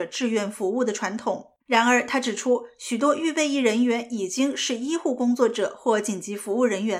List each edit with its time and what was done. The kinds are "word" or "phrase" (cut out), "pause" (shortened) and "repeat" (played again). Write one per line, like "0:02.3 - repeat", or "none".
0:01.6 - pause